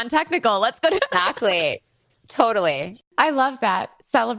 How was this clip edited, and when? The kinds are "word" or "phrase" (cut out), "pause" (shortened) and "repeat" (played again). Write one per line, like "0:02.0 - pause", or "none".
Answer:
0:01.0 - word